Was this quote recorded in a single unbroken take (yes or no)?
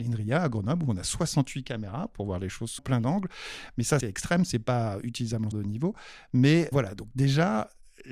no